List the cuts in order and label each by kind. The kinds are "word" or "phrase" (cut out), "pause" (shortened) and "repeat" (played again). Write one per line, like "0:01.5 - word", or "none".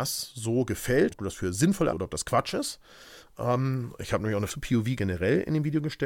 0:01.1 - word
0:01.9 - word
0:04.5 - word
0:05.0 - word